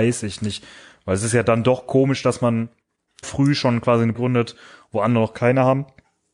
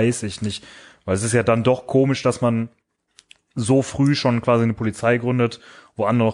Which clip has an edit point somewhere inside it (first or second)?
first